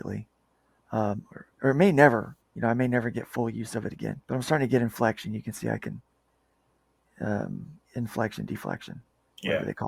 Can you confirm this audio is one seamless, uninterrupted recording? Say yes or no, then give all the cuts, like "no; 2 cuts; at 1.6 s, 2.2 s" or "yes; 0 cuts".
no; 4 cuts; at 1.5 s, 2.4 s, 4.2 s, 7.8 s